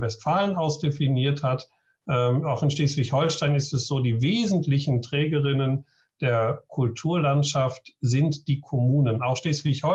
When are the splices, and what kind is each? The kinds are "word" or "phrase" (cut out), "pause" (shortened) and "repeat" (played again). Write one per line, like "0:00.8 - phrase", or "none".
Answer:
none